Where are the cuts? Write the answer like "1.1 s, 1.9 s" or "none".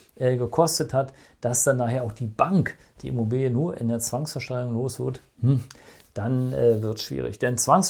none